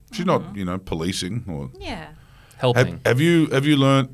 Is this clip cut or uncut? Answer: uncut